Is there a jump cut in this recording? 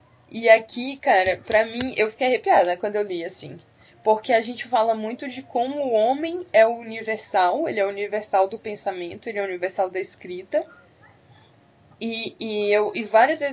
no; 0 cuts

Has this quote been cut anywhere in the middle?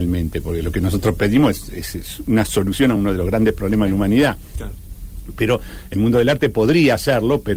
no; 0 cuts

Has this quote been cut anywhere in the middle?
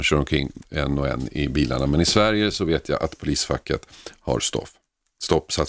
no; 0 cuts

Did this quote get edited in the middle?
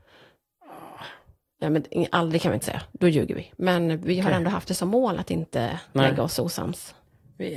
no; 0 cuts

